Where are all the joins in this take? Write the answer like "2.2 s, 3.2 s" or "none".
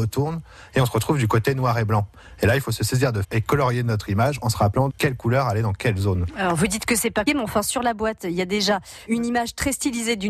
3.2 s, 4.9 s, 7.3 s